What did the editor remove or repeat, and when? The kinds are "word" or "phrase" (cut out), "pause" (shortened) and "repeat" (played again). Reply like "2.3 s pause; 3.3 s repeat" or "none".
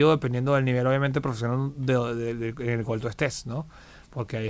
none